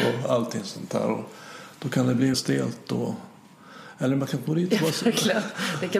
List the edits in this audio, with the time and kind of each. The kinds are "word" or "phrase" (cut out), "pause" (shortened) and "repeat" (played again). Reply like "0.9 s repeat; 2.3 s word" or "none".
2.3 s word